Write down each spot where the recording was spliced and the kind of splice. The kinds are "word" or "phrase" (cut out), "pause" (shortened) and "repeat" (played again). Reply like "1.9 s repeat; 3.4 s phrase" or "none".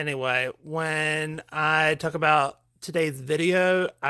none